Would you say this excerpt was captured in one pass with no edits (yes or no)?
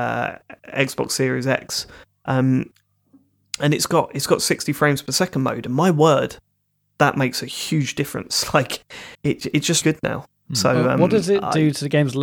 no